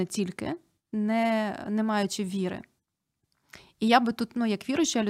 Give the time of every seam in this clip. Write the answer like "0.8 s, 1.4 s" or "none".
none